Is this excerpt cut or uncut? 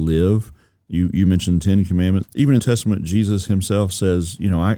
cut